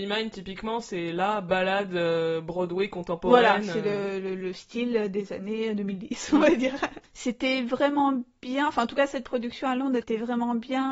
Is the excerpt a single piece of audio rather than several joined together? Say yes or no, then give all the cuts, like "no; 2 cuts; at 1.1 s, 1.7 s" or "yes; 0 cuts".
yes; 0 cuts